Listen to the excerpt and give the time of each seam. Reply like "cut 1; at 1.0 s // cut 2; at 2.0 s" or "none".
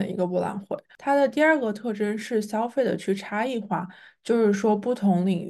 none